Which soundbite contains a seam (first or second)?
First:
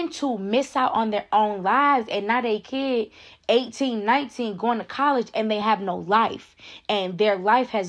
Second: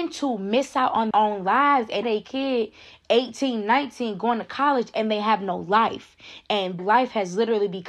second